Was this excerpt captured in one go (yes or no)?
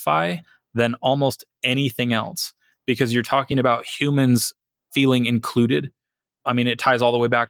yes